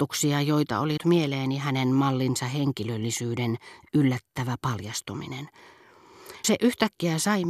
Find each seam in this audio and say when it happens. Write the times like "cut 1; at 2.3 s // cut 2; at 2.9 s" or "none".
cut 1; at 1.0 s // cut 2; at 6.4 s